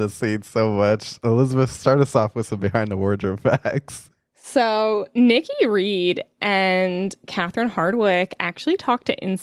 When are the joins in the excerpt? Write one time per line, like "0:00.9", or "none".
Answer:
none